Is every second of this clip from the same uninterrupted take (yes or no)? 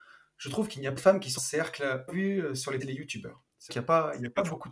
no